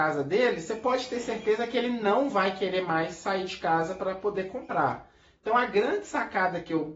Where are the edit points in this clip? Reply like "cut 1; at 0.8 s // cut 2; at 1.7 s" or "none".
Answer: none

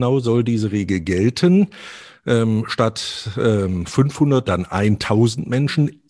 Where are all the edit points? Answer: cut 1; at 4.5 s

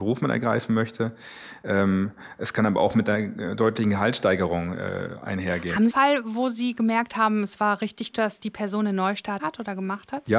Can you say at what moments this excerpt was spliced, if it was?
cut 1; at 5.9 s // cut 2; at 8.1 s // cut 3; at 9.4 s

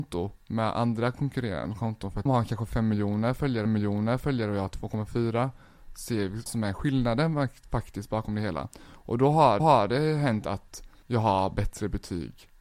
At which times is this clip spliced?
cut 1; at 2.3 s // cut 2; at 3.7 s // cut 3; at 6.5 s // cut 4; at 9.6 s // cut 5; at 11.0 s

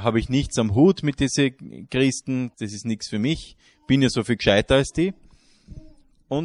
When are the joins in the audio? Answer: cut 1; at 2.5 s

